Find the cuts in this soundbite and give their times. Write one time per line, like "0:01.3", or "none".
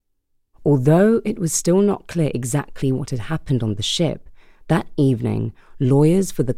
none